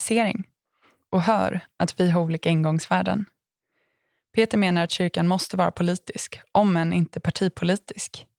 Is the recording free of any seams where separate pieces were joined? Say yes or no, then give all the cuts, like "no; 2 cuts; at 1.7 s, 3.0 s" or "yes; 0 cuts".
yes; 0 cuts